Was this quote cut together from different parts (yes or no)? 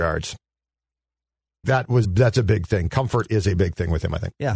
yes